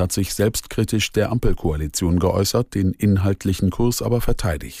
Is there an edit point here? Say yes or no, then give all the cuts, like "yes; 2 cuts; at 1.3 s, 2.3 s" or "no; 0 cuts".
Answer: yes; 1 cut; at 1.1 s